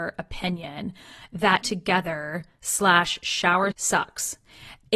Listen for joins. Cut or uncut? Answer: cut